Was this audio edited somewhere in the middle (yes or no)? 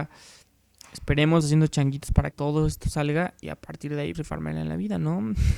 yes